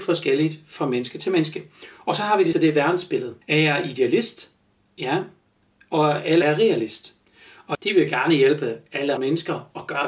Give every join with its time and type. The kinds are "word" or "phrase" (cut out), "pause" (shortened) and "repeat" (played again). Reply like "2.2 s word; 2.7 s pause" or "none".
2.5 s word; 3.4 s pause; 4.6 s pause; 6.4 s word; 7.7 s word; 9.2 s word